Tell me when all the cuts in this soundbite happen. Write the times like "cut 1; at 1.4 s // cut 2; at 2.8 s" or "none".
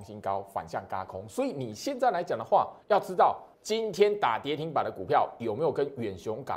cut 1; at 2.8 s // cut 2; at 3.5 s